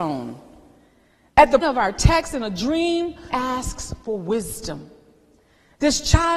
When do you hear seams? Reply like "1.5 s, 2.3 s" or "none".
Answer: 1.6 s, 3.3 s